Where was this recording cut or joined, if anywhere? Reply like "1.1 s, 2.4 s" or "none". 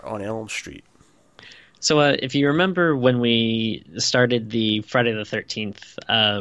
none

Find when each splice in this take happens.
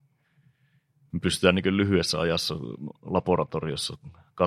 none

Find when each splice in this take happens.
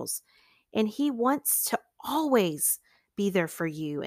none

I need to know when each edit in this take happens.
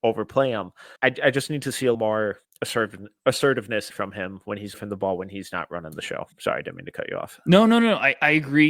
1.0 s, 1.9 s, 2.4 s, 3.9 s, 4.7 s, 6.3 s

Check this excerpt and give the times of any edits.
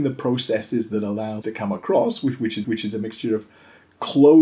1.4 s, 2.6 s

